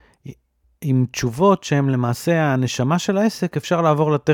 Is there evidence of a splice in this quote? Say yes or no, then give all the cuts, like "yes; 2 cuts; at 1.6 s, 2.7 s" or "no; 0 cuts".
no; 0 cuts